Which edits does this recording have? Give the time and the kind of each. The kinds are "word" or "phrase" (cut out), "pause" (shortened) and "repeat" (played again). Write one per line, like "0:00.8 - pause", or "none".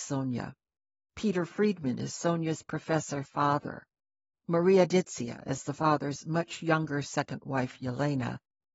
none